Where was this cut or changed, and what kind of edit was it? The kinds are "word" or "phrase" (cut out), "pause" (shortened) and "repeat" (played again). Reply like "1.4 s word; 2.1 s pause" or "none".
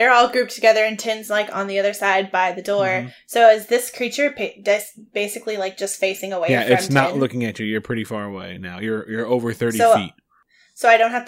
none